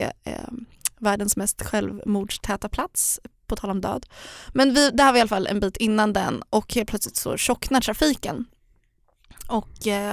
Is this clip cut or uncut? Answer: uncut